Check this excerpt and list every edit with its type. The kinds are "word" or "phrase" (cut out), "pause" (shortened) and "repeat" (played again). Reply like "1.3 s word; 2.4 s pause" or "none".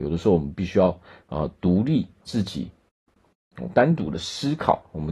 2.3 s word